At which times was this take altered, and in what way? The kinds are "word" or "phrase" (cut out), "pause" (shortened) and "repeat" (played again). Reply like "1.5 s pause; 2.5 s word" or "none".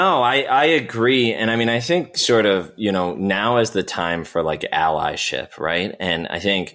none